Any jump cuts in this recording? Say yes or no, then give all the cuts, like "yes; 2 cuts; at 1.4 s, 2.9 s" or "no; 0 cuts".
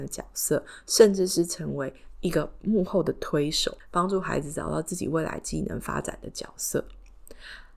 yes; 1 cut; at 3.8 s